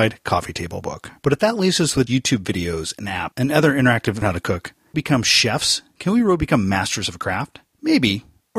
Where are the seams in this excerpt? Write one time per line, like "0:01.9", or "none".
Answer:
0:01.2
0:02.1
0:04.2
0:04.9